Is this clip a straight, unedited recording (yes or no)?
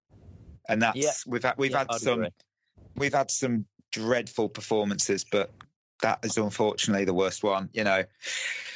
yes